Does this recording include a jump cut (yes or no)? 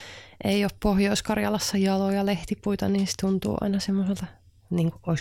no